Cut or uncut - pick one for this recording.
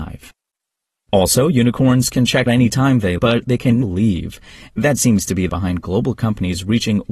cut